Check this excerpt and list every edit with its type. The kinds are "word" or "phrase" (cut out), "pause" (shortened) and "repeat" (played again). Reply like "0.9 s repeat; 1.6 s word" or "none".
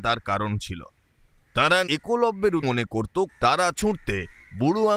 1.9 s word; 2.6 s word; 3.3 s word; 3.8 s word